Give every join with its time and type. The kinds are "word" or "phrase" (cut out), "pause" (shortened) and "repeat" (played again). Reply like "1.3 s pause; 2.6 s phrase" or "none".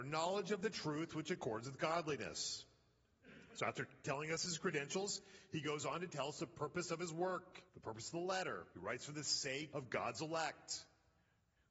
7.7 s pause; 8.7 s pause; 9.7 s word